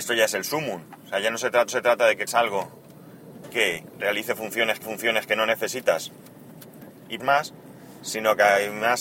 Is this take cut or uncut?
cut